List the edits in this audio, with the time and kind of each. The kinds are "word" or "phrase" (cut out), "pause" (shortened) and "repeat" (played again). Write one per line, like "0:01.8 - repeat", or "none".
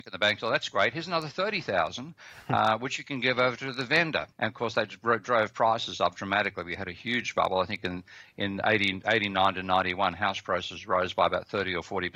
0:04.3 - pause